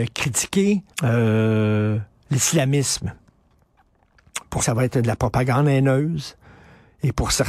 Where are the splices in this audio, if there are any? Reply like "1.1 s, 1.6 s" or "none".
0.9 s, 4.6 s

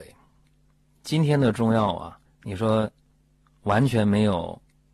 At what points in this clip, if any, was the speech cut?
2.3 s

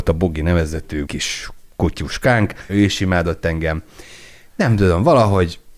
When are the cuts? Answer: 1.1 s, 2.7 s

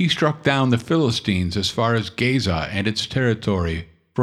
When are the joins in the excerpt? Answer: none

